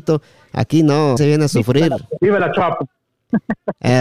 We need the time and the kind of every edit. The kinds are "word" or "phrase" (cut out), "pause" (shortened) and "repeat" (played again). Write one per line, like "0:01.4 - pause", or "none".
0:01.2 - word

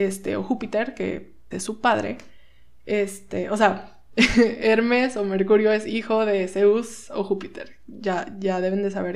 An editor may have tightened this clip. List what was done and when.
0:01.5 - word

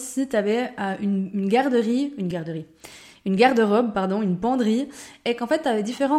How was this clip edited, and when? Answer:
none

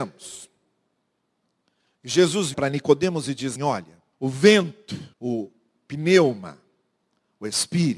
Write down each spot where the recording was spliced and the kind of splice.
0:02.5 - word
0:03.6 - word
0:04.1 - pause
0:05.1 - pause

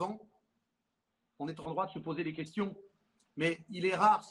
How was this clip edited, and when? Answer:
none

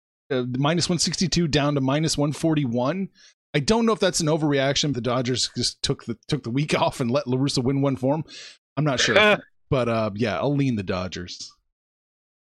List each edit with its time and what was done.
0:04.9 - word

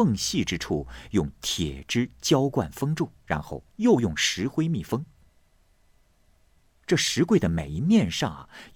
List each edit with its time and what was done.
0:03.2 - pause
0:03.7 - pause

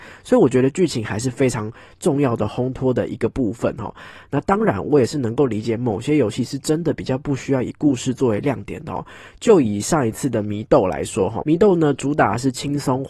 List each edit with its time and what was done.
0:11.4 - word

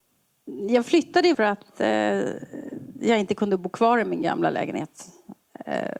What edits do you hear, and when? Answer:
0:01.3 - phrase

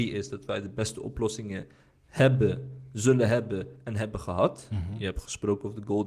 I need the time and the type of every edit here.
none

